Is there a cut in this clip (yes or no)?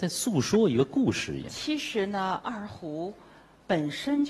no